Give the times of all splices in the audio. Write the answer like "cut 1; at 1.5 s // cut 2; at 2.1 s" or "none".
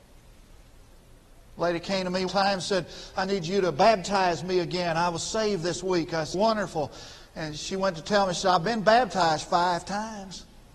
cut 1; at 2.3 s // cut 2; at 6.3 s